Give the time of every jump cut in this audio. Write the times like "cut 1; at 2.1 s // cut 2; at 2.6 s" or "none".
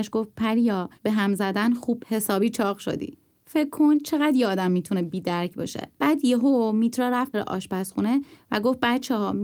cut 1; at 1.0 s // cut 2; at 2.0 s // cut 3; at 5.9 s // cut 4; at 7.3 s

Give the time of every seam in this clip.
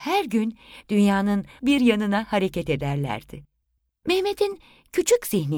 cut 1; at 1.6 s

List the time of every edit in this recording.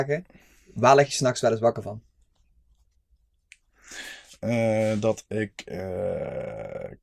none

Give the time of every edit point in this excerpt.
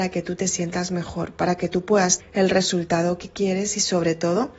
cut 1; at 2.2 s

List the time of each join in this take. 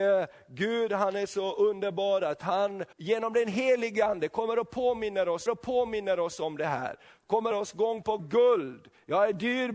cut 1; at 2.9 s // cut 2; at 5.5 s // cut 3; at 7.5 s // cut 4; at 8.2 s

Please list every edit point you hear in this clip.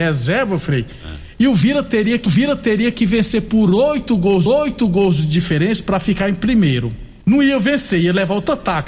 cut 1; at 2.3 s // cut 2; at 4.5 s // cut 3; at 7.2 s

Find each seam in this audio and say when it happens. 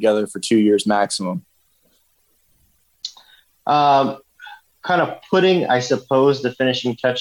none

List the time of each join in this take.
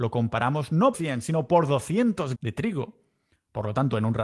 cut 1; at 0.9 s // cut 2; at 2.3 s

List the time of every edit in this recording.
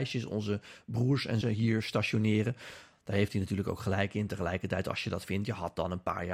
cut 1; at 1.4 s

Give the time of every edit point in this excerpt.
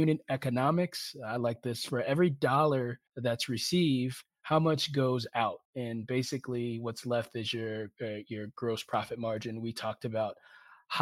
cut 1; at 3.1 s // cut 2; at 5.6 s

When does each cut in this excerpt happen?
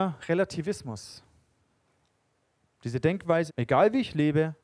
cut 1; at 3.5 s

